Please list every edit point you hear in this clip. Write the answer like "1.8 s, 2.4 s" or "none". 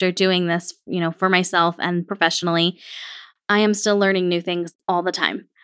none